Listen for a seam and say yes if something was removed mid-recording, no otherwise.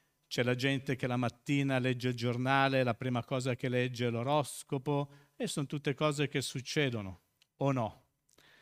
no